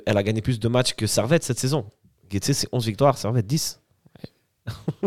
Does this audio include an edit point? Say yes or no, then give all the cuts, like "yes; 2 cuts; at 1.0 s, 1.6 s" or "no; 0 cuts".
no; 0 cuts